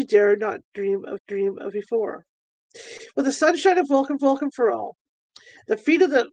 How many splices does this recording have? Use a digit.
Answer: 2